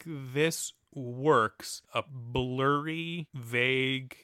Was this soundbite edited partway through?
yes; 1 cut; at 1.9 s

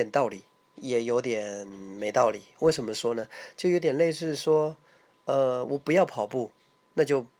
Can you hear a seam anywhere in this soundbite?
no; 0 cuts

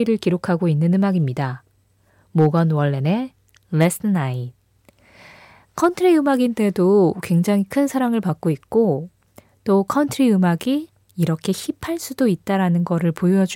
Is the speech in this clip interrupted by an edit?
no; 0 cuts

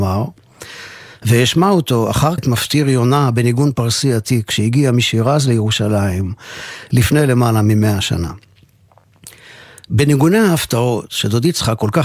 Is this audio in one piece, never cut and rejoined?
no; 1 cut; at 2.4 s

